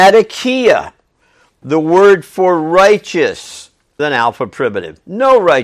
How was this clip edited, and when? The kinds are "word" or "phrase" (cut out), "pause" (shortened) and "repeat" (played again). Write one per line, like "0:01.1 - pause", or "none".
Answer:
0:04.0 - word